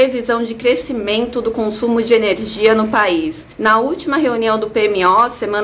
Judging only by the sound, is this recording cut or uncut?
cut